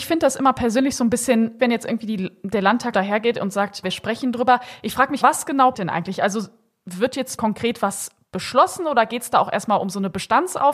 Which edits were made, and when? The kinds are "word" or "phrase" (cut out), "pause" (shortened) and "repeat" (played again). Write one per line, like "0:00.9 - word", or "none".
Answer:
0:01.6 - word
0:02.9 - word
0:03.8 - word
0:05.2 - word
0:05.7 - word
0:07.4 - word